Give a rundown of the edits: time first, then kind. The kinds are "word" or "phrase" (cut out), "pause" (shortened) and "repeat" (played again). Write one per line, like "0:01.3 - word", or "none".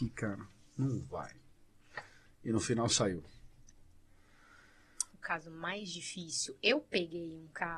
none